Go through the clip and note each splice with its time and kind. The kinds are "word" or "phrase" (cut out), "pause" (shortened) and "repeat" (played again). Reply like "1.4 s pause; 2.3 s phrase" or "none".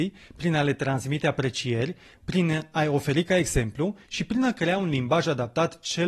none